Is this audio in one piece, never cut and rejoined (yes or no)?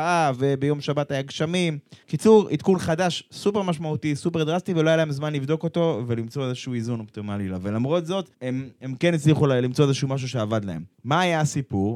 no